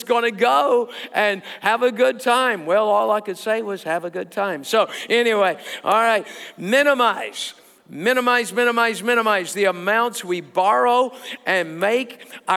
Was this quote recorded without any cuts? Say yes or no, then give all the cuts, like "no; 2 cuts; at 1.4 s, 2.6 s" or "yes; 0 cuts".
yes; 0 cuts